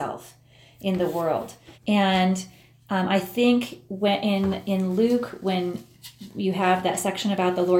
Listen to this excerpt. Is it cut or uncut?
cut